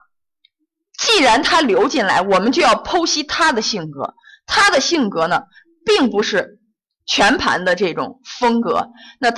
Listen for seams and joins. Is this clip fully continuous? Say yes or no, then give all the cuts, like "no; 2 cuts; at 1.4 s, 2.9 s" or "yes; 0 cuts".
yes; 0 cuts